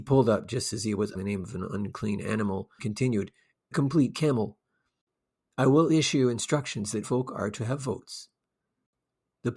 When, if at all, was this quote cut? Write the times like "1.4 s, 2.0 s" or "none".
1.1 s, 2.8 s, 3.7 s, 7.0 s